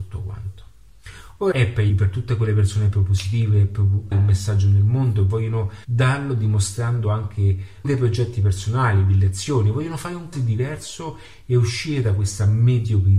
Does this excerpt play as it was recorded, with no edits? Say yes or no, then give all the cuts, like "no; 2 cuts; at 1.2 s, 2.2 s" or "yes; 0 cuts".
no; 6 cuts; at 1.5 s, 1.9 s, 4.1 s, 5.8 s, 7.8 s, 10.3 s